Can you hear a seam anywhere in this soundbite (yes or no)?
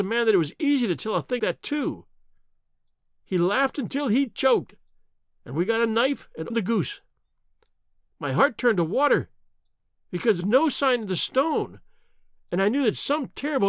yes